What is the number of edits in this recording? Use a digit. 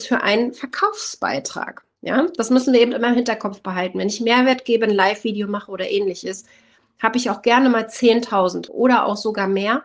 1